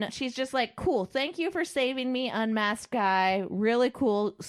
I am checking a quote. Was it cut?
no; 0 cuts

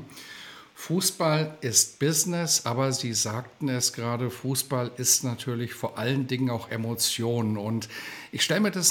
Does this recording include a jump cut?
no; 0 cuts

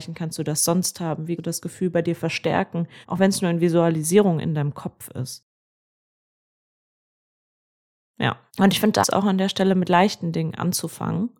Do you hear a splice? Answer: yes; 4 cuts; at 1.4 s, 3.0 s, 8.5 s, 9.0 s

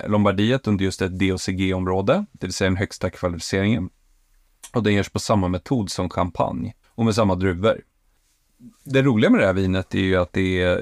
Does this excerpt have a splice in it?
yes; 1 cut; at 6.8 s

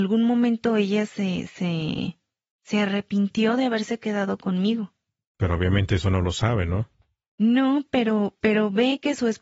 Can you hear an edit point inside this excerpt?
no; 0 cuts

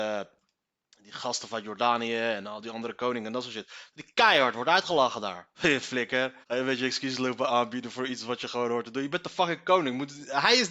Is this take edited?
yes; 2 cuts; at 5.5 s, 6.4 s

